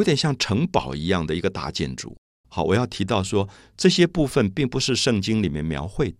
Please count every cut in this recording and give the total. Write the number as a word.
zero